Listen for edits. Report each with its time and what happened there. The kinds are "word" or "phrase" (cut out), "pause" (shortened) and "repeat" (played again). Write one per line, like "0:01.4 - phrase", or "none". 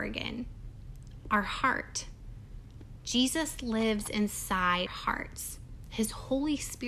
0:04.9 - word

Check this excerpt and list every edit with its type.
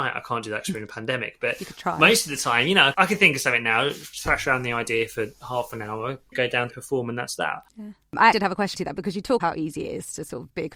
0:02.9 - word
0:04.1 - word
0:06.3 - word
0:06.7 - word
0:08.3 - word
0:08.7 - word
0:09.4 - word

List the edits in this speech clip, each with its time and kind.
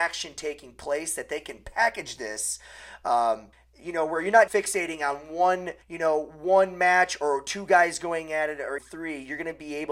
0:03.5 - pause
0:04.5 - word
0:05.8 - pause
0:08.8 - word

